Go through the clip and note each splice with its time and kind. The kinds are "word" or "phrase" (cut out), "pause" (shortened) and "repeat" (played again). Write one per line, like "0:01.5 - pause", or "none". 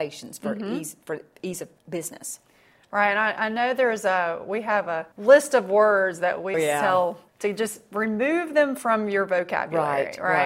0:01.8 - pause
0:05.1 - pause
0:06.5 - word
0:07.3 - pause